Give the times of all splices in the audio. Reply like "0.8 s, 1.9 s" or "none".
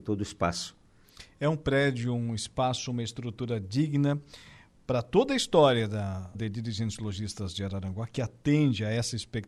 6.3 s